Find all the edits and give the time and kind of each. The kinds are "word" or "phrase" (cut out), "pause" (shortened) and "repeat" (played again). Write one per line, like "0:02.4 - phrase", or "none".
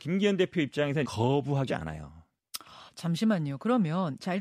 0:01.0 - word
0:01.7 - word